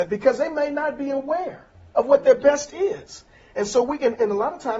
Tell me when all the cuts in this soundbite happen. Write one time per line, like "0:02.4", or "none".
0:01.9